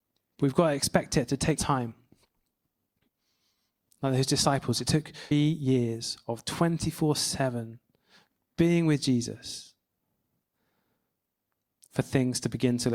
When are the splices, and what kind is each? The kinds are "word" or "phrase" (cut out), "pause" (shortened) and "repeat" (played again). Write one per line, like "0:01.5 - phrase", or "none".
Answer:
0:01.6 - word
0:05.3 - word